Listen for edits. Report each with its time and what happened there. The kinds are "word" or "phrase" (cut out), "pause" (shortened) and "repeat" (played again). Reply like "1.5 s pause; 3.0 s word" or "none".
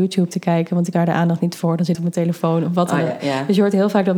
0.9 s word; 1.9 s phrase